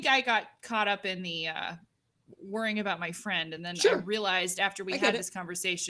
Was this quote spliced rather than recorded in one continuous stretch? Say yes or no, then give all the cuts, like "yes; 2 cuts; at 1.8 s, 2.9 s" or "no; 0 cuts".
no; 0 cuts